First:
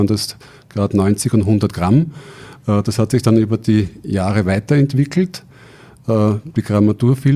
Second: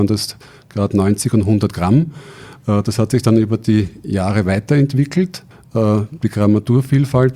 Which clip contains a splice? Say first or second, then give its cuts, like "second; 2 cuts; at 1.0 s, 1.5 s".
second; 1 cut; at 5.5 s